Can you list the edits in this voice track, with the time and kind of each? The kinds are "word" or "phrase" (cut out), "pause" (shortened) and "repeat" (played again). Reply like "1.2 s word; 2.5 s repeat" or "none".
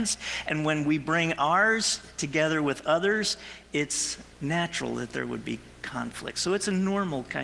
4.3 s pause